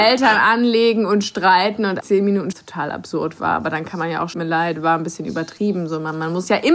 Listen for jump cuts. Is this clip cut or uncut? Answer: cut